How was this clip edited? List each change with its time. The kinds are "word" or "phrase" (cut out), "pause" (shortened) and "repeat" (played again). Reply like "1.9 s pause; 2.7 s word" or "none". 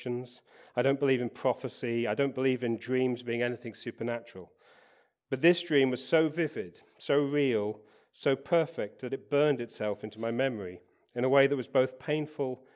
none